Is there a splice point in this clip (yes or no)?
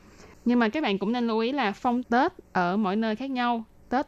yes